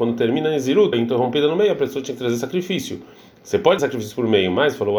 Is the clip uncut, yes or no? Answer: no